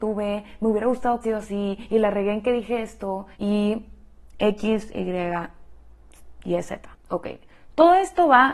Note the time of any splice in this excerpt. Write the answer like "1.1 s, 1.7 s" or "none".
1.2 s, 3.3 s, 7.0 s